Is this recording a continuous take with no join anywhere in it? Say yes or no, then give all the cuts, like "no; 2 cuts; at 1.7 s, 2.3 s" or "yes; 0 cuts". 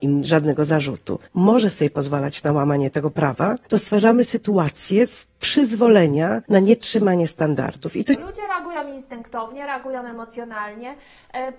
no; 3 cuts; at 1.3 s, 3.6 s, 6.4 s